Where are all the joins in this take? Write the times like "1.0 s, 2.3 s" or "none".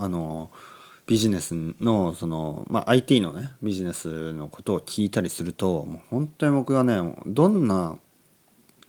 none